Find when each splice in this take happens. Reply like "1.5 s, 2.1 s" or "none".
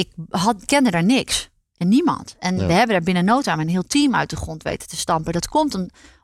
none